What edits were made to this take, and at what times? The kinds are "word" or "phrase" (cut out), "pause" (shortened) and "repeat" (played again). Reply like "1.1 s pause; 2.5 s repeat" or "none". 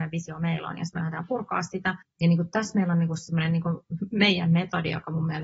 2.0 s pause